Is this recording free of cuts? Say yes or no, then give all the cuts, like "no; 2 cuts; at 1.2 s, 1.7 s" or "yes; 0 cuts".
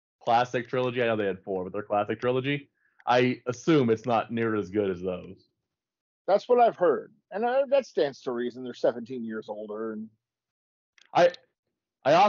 yes; 0 cuts